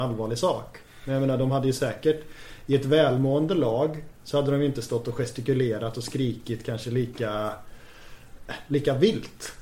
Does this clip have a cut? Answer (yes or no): no